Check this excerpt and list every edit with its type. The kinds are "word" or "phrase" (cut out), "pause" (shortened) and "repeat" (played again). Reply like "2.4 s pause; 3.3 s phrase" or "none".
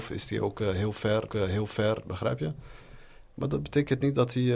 1.3 s repeat